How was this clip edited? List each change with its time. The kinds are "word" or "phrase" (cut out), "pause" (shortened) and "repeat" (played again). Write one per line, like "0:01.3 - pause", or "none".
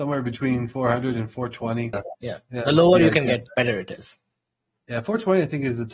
0:01.9 - phrase